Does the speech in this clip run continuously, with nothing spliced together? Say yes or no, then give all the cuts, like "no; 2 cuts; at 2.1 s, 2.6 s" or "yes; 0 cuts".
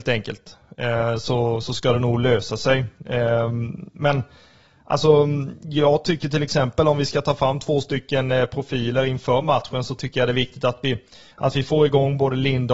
yes; 0 cuts